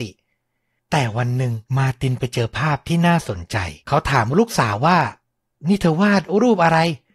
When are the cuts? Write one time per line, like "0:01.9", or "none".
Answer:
0:01.7
0:03.8